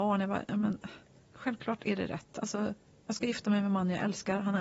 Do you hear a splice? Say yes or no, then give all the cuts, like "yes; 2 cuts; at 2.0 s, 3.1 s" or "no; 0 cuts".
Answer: no; 0 cuts